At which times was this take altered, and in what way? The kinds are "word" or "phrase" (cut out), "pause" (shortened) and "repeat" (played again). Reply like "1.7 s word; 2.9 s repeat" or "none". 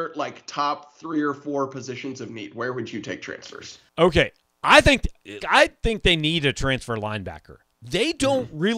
3.9 s pause; 5.4 s word